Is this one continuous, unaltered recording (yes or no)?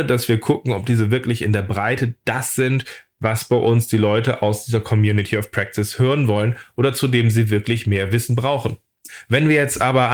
yes